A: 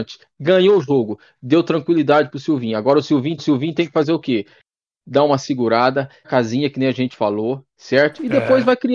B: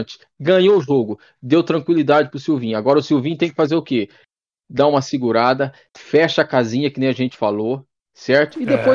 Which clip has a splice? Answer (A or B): A